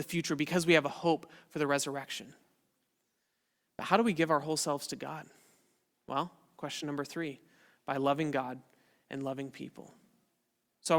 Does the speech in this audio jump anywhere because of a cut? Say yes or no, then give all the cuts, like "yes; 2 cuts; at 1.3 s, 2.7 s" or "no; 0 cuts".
no; 0 cuts